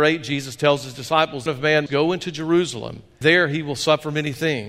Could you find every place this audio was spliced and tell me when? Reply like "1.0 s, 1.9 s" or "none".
1.5 s, 1.9 s, 3.2 s